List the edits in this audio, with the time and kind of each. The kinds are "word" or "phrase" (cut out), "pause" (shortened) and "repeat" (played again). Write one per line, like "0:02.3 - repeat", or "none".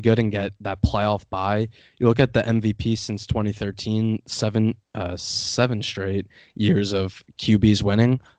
none